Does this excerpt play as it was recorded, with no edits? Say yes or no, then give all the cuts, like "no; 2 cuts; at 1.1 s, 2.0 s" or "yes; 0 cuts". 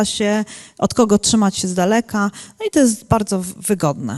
yes; 0 cuts